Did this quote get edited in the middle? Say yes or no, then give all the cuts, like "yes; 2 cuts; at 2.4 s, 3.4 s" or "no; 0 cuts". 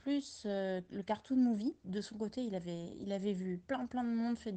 no; 0 cuts